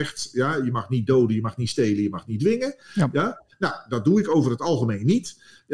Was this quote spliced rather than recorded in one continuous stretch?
no; 0 cuts

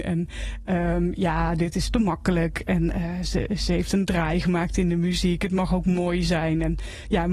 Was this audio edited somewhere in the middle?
no; 0 cuts

